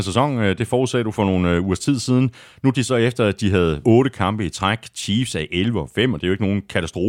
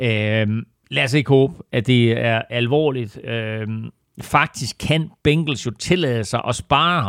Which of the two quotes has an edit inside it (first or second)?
first